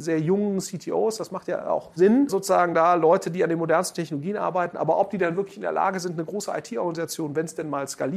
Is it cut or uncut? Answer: uncut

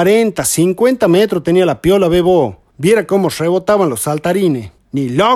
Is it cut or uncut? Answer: uncut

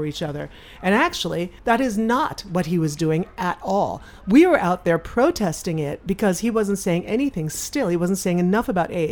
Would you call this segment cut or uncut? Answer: cut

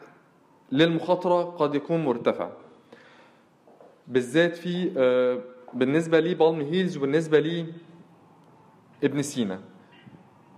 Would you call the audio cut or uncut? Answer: uncut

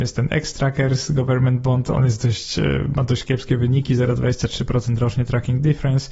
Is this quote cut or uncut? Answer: uncut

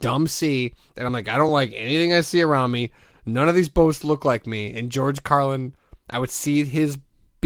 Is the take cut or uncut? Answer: uncut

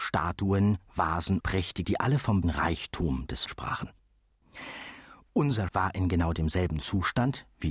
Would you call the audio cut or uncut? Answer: cut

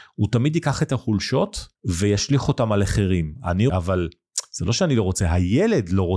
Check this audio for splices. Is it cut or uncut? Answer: cut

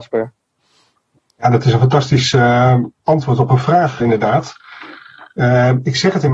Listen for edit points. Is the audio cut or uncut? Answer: cut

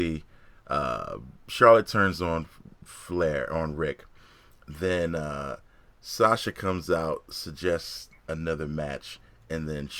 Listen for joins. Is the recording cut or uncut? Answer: uncut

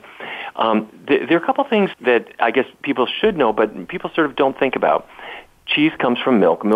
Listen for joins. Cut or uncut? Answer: cut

